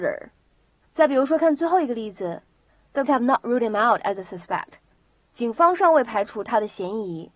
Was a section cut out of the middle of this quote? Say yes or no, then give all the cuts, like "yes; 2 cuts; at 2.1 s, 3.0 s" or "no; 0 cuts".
yes; 1 cut; at 3.1 s